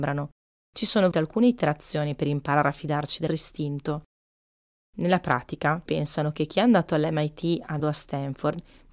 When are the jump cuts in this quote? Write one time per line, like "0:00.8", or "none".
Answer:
0:01.1
0:03.3
0:05.9
0:07.8